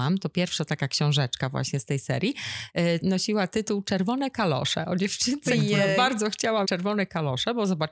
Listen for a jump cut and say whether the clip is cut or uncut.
cut